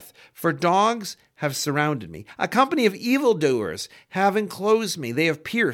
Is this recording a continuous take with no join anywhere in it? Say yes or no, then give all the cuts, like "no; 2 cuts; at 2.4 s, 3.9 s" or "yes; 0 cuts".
yes; 0 cuts